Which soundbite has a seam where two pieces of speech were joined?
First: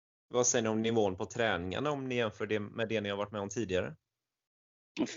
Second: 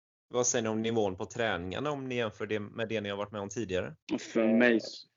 second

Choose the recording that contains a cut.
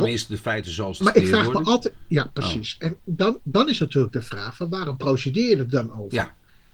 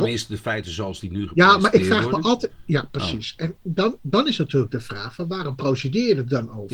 first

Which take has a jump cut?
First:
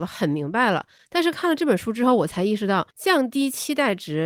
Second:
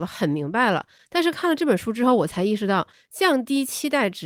first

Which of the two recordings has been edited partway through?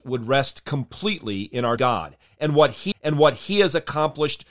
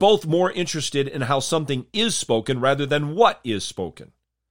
first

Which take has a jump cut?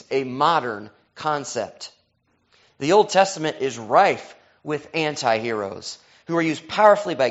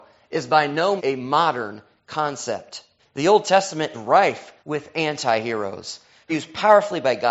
second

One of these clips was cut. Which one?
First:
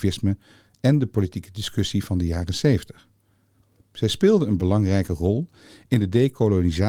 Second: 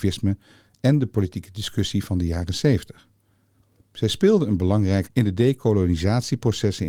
second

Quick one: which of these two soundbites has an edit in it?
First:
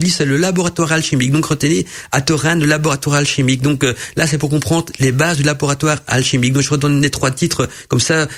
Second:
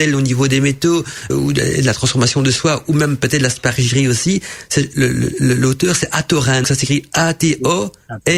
second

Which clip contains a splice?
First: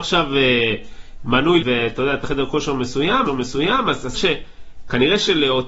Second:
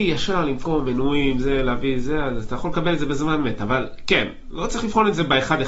first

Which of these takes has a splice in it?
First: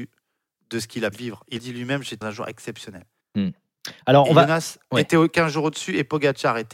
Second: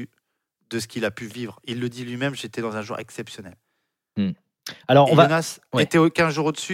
first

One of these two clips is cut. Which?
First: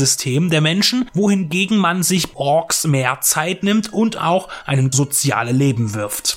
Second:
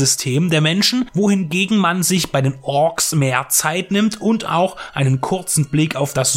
first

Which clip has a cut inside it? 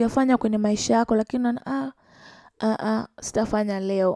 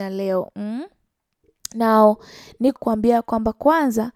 second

